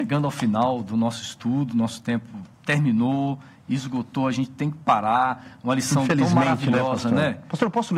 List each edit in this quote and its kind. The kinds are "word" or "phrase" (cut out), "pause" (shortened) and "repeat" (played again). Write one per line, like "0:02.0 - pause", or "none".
0:02.5 - pause